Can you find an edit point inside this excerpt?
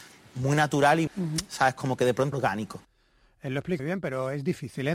yes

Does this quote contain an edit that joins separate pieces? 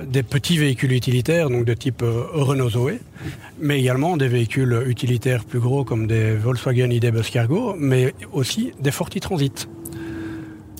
no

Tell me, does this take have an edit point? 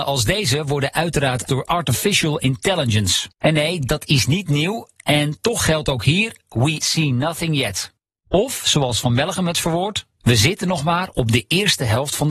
yes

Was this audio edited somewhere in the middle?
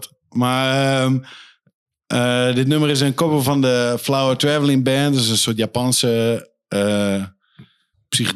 no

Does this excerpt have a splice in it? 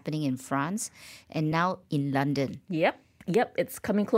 no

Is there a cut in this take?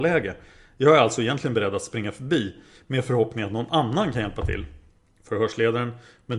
no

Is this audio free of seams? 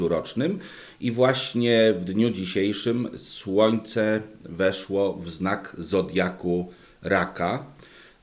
yes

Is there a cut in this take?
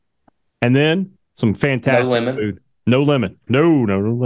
no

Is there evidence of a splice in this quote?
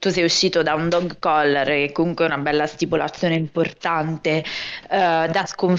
no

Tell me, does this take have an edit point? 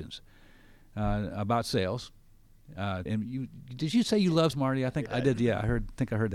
yes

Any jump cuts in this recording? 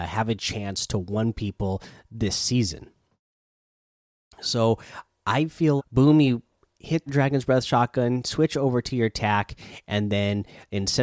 yes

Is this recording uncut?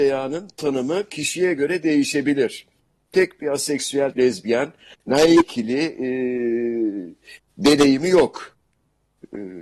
no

